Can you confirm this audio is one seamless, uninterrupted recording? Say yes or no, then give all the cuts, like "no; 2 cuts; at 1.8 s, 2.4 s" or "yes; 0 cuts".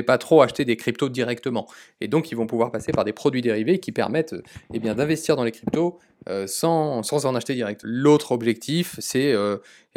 yes; 0 cuts